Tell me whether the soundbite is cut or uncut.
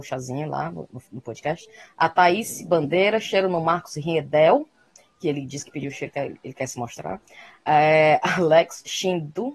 uncut